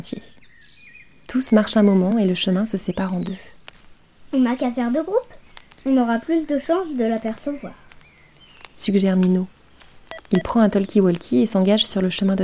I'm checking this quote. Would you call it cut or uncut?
uncut